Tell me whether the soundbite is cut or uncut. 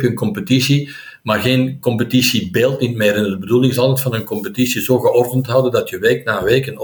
uncut